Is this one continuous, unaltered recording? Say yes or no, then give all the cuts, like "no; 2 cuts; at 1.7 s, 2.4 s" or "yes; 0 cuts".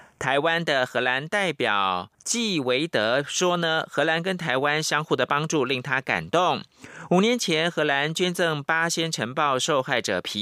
no; 1 cut; at 2.1 s